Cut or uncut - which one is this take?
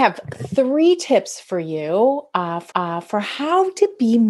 cut